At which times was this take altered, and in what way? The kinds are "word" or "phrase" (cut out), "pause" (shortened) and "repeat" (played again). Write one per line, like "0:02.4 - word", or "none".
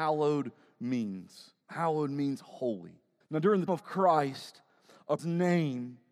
0:01.6 - pause
0:03.2 - pause
0:03.7 - word
0:05.2 - word